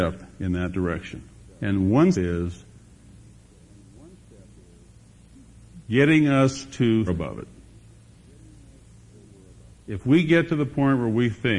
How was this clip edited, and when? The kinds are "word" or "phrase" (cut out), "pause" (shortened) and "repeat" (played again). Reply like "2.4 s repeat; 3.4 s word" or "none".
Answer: 1.5 s pause; 2.1 s word; 7.1 s phrase